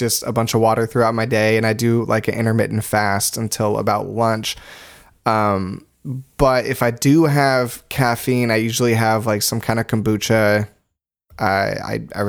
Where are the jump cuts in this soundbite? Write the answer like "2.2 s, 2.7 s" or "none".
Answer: none